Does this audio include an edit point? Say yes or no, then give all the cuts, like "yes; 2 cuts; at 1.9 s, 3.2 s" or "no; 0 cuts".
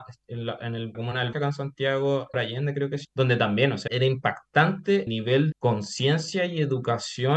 yes; 7 cuts; at 0.9 s, 1.3 s, 2.3 s, 3.0 s, 3.9 s, 5.1 s, 5.5 s